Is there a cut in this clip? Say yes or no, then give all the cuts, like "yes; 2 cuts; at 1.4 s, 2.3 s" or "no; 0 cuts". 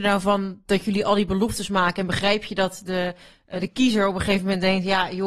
no; 0 cuts